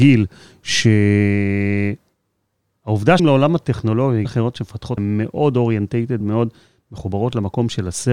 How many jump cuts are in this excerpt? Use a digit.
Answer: 4